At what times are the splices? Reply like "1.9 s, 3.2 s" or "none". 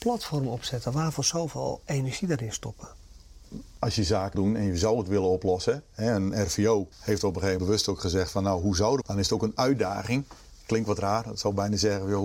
4.3 s, 6.9 s, 7.6 s, 9.0 s